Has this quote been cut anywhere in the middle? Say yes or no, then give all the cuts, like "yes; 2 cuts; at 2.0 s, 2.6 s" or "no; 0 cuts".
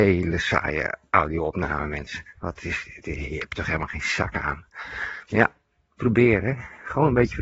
yes; 1 cut; at 6.0 s